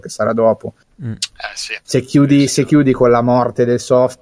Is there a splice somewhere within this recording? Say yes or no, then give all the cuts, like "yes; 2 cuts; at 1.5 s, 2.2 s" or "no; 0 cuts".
no; 0 cuts